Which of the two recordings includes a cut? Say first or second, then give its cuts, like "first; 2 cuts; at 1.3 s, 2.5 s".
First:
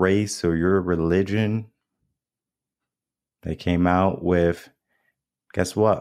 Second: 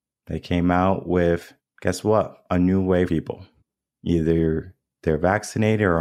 second; 3 cuts; at 1.6 s, 3.1 s, 3.6 s